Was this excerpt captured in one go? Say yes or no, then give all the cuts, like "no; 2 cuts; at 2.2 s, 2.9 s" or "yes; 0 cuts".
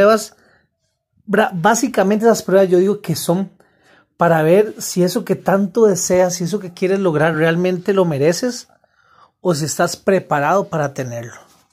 yes; 0 cuts